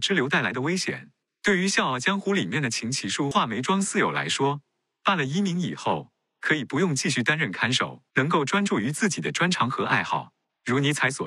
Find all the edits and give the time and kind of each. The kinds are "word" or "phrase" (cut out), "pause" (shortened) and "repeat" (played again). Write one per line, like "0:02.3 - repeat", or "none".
0:08.1 - pause